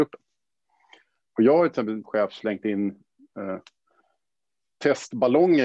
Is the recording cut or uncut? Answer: cut